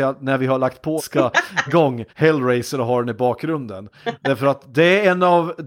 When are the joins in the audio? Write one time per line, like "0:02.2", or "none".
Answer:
0:01.0
0:01.7
0:02.1

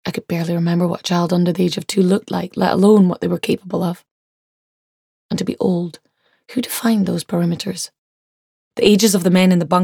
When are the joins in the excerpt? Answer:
none

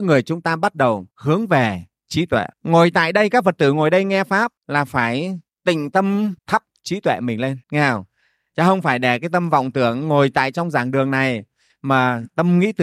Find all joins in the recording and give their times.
0:01.1
0:02.5
0:04.6
0:05.5
0:06.4
0:07.6

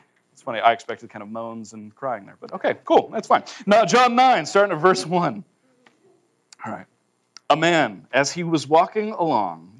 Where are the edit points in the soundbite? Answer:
none

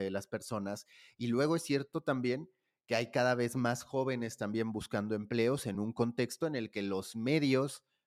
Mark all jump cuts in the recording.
none

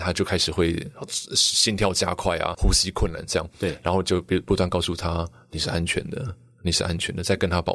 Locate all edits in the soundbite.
0:02.5

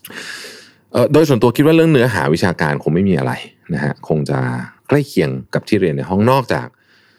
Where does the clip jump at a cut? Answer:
0:04.8
0:05.5

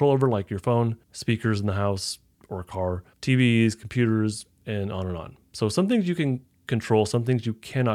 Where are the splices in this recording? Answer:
0:01.0
0:02.3
0:03.1

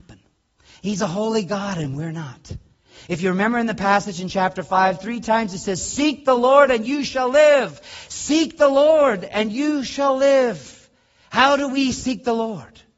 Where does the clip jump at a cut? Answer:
none

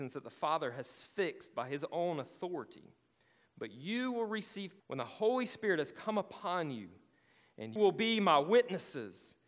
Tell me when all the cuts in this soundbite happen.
0:04.8
0:07.8

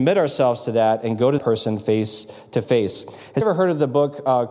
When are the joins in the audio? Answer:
0:01.4
0:03.4

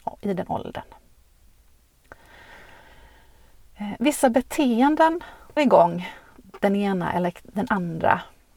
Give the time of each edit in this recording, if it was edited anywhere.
0:05.6

